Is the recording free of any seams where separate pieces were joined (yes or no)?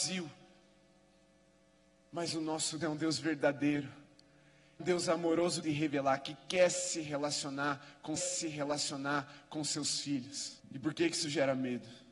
no